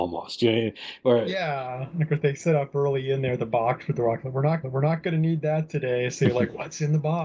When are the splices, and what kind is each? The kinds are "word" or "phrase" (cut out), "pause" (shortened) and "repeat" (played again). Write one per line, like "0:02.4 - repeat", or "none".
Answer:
0:04.6 - repeat